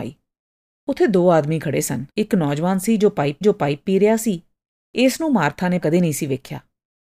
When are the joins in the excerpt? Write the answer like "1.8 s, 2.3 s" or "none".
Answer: 2.1 s, 3.4 s, 5.8 s